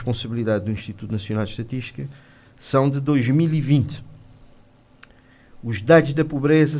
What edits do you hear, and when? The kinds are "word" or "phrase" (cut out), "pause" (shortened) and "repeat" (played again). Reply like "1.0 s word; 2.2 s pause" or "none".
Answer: none